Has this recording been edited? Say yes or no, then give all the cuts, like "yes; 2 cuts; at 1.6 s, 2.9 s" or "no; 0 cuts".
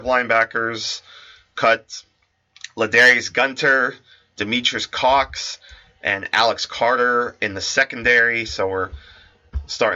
no; 0 cuts